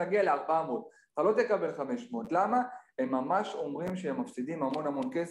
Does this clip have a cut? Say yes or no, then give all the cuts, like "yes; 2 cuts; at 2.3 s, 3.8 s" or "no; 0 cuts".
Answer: no; 0 cuts